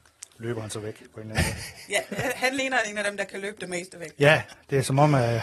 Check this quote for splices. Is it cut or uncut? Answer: uncut